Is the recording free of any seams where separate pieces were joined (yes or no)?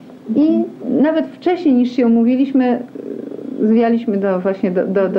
yes